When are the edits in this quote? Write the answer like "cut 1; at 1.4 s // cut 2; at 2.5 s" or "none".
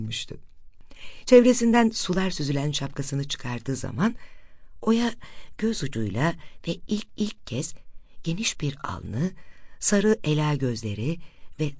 cut 1; at 7.2 s